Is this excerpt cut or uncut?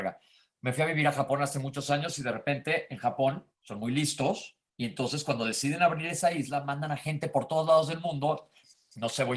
cut